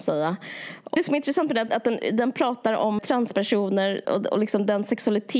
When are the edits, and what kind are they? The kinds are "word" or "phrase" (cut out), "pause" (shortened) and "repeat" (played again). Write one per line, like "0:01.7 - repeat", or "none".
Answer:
0:01.7 - word
0:03.0 - word
0:04.0 - word